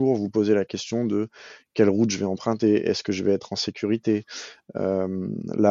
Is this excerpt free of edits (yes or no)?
yes